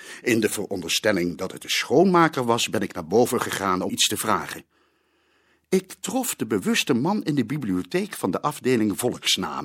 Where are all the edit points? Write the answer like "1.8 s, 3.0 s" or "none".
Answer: 3.9 s